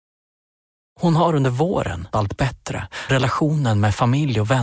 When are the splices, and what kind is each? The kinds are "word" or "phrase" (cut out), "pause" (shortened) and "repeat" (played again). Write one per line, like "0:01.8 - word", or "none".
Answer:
0:02.1 - word
0:03.1 - word